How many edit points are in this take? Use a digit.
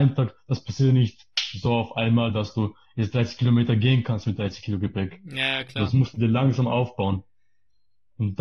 0